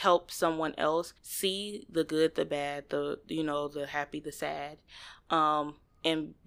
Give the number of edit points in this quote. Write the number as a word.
one